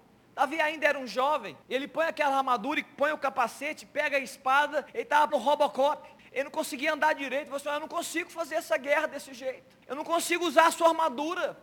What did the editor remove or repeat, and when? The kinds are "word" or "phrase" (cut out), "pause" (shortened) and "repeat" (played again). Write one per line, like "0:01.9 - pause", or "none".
0:01.6 - pause
0:04.9 - pause
0:05.3 - word
0:06.2 - pause
0:09.8 - pause